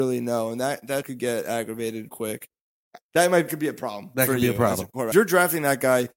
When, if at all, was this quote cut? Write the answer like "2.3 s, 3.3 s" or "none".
1.0 s, 2.1 s, 3.5 s, 5.1 s